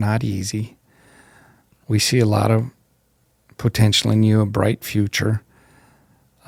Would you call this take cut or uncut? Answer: uncut